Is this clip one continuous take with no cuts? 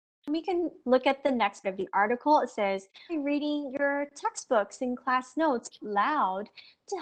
no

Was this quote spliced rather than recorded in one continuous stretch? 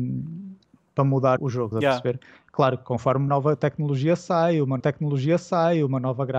yes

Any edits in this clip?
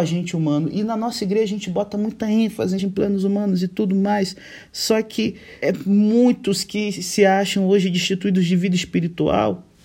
yes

